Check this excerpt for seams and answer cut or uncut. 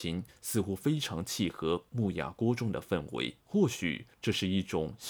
cut